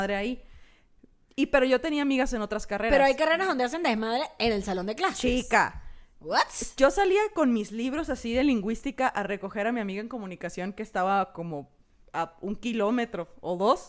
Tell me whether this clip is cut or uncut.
uncut